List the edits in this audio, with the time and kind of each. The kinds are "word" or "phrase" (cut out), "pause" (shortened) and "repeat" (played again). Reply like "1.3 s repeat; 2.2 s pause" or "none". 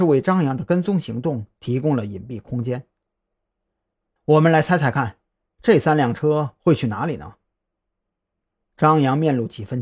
none